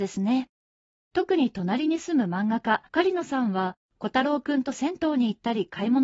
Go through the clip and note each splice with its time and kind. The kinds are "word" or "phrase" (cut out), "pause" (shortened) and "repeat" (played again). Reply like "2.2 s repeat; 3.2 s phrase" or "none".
2.9 s pause